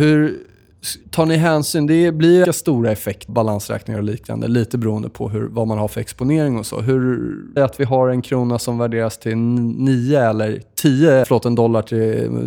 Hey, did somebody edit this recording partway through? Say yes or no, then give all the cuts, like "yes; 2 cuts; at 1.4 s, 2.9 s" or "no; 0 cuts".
yes; 5 cuts; at 1.0 s, 2.4 s, 3.3 s, 7.6 s, 11.2 s